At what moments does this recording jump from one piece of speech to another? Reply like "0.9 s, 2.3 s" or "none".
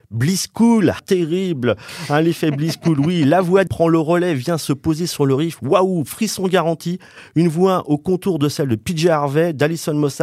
1.0 s, 3.7 s